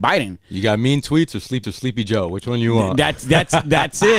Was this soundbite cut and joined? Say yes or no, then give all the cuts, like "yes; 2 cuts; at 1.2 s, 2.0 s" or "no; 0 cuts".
yes; 1 cut; at 1.6 s